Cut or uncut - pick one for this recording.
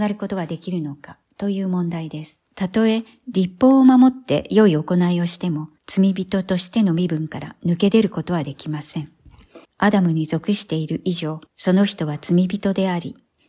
cut